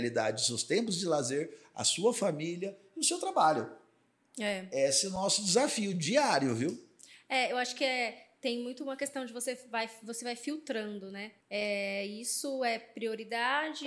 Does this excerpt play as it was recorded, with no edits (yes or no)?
no